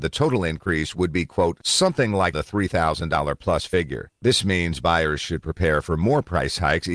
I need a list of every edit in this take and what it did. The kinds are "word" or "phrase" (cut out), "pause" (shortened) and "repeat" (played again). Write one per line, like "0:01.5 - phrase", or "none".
0:02.3 - word
0:04.1 - pause